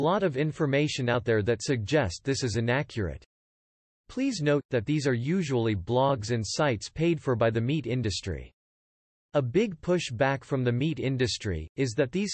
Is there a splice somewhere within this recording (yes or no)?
no